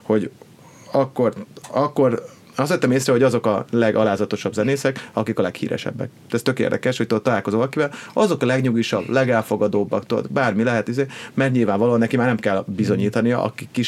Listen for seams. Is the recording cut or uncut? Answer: uncut